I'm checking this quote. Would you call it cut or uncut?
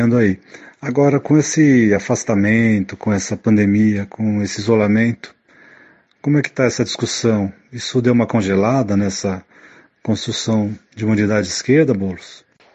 uncut